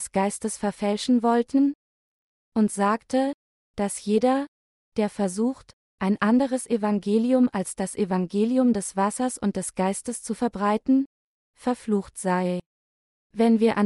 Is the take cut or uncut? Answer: uncut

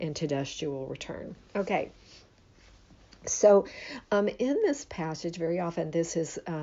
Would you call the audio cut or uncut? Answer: uncut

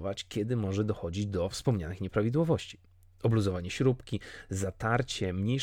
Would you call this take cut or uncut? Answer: uncut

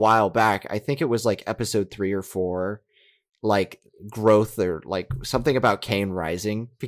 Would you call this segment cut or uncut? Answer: uncut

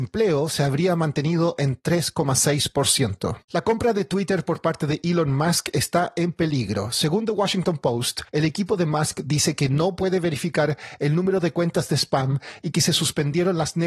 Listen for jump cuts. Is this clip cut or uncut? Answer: cut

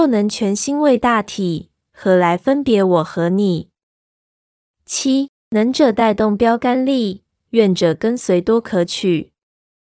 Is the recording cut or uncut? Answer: cut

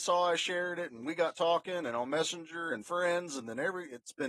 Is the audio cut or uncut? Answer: cut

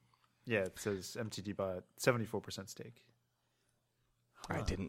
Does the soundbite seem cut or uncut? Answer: uncut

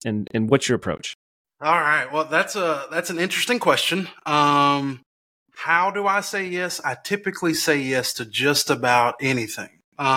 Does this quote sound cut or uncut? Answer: uncut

